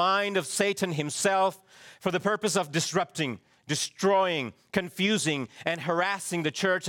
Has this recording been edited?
no; 0 cuts

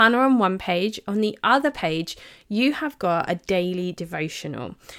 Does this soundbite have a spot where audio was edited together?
no; 0 cuts

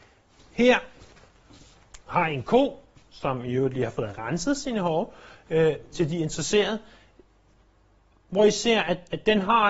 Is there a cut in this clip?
no; 0 cuts

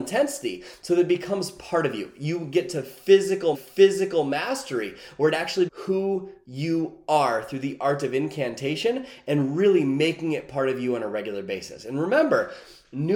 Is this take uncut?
no; 2 cuts; at 3.5 s, 5.7 s

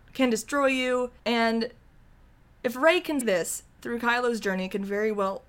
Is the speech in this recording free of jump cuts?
no; 2 cuts; at 1.2 s, 3.2 s

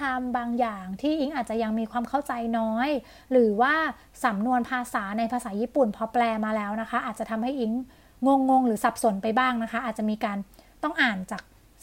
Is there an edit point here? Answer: no; 0 cuts

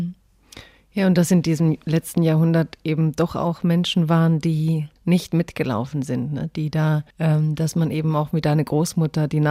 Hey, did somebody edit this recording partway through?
yes; 2 cuts; at 5.0 s, 7.1 s

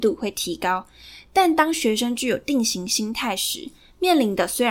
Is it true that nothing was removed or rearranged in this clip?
yes; 0 cuts

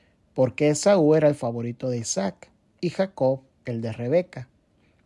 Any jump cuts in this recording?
no; 0 cuts

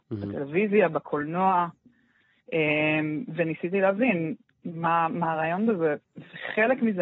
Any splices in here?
no; 0 cuts

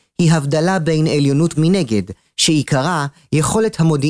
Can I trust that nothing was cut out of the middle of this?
no; 1 cut; at 1.5 s

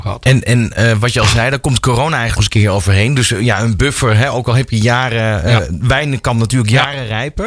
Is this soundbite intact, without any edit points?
no; 1 cut; at 2.4 s

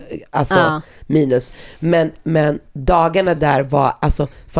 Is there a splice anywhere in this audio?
no; 0 cuts

